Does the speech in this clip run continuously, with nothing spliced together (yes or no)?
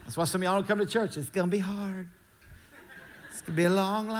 yes